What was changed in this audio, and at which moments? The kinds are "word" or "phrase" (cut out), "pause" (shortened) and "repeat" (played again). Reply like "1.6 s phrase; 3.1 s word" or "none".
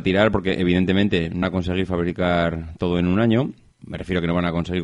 1.4 s word; 3.8 s word